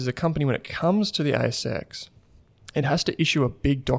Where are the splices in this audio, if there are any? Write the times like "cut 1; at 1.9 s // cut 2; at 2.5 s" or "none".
none